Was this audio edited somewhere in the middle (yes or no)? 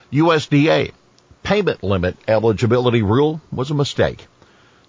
no